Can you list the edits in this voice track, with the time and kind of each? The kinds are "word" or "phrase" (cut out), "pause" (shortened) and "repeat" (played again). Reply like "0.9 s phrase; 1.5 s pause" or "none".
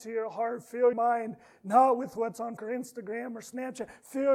0.9 s word; 2.6 s word